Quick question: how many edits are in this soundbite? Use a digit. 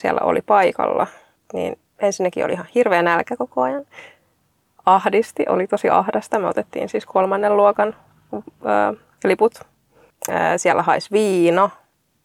1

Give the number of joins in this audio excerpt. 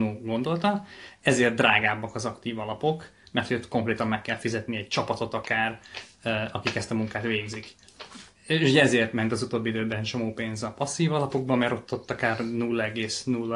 0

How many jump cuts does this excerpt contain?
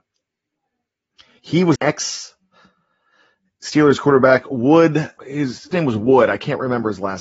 3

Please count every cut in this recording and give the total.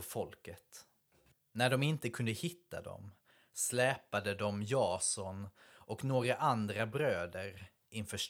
0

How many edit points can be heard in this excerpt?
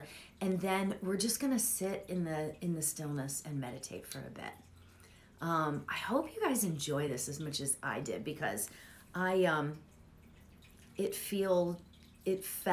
0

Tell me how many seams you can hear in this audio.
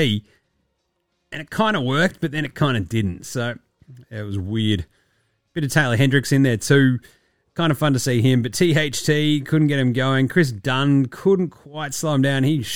0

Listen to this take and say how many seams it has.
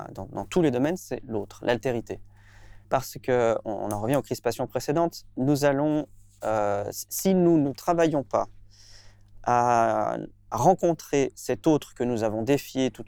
1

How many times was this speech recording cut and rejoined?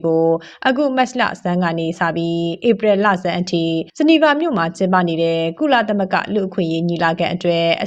1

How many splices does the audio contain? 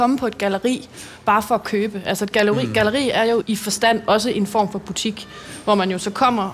1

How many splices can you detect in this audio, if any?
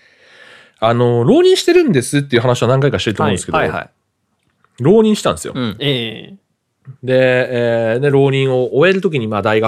1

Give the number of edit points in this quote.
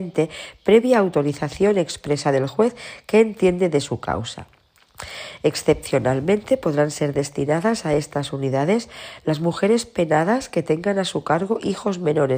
0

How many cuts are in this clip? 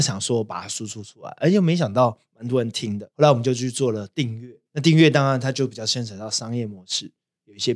2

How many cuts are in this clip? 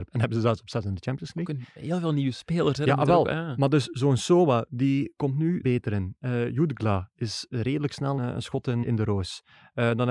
3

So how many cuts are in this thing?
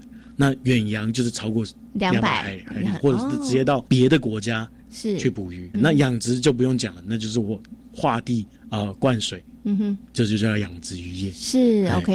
3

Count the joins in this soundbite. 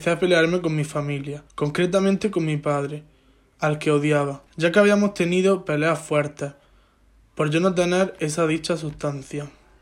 2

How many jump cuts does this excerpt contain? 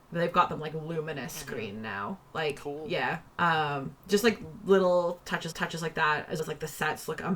2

